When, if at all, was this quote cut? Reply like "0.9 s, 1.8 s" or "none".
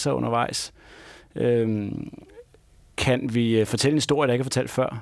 none